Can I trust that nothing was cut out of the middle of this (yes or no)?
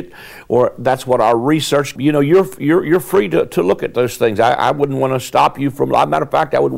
no